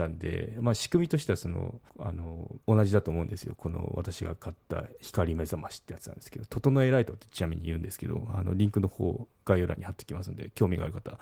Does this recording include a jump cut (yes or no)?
yes